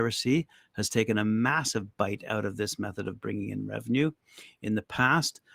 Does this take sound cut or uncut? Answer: uncut